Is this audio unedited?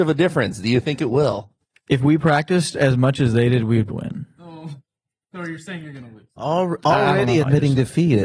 no; 1 cut; at 3.9 s

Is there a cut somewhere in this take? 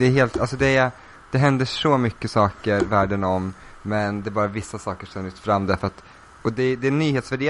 no; 0 cuts

